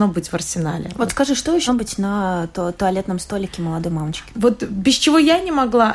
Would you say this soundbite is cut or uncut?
cut